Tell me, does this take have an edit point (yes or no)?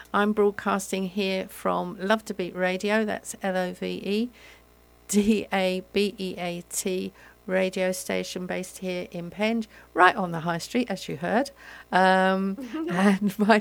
no